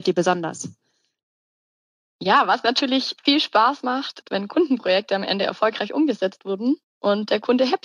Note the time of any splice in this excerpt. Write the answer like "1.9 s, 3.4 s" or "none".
3.2 s, 4.2 s